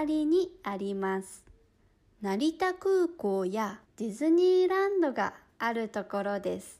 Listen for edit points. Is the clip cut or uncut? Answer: cut